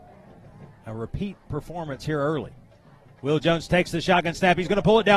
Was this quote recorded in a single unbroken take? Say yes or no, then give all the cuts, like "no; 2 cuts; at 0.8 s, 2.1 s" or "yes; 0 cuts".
yes; 0 cuts